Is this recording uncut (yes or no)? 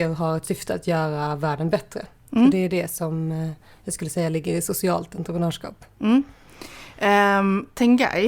yes